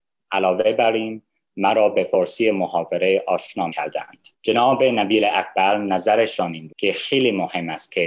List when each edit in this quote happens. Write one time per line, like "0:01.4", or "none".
0:03.7
0:04.3
0:06.7